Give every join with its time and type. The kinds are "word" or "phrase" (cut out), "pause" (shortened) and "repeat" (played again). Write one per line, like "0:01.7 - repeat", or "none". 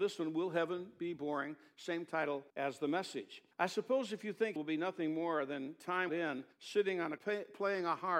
0:02.5 - pause
0:03.5 - pause
0:04.6 - word
0:06.1 - word
0:06.5 - pause
0:07.2 - word